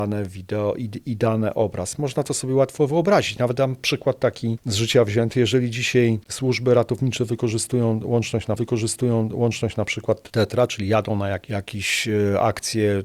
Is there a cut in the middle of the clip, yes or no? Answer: yes